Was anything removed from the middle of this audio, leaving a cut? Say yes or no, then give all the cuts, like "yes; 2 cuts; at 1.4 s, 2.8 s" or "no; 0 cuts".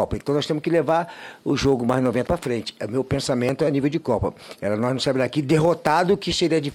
yes; 1 cut; at 2.3 s